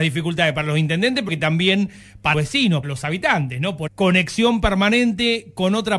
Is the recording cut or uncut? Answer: cut